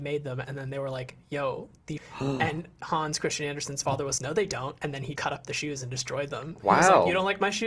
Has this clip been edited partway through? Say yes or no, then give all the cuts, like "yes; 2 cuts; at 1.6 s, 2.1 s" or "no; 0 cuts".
yes; 3 cuts; at 2.0 s, 4.2 s, 5.2 s